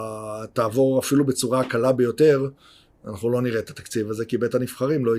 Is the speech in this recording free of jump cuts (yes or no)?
yes